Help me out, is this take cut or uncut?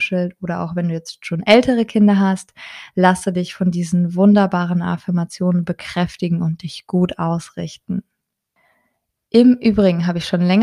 uncut